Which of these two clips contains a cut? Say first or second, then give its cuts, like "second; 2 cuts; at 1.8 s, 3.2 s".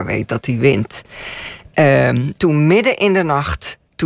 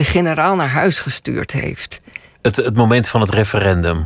first; 1 cut; at 2.4 s